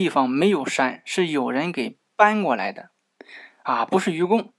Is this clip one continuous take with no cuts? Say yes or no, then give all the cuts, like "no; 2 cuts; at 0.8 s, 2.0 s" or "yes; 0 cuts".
yes; 0 cuts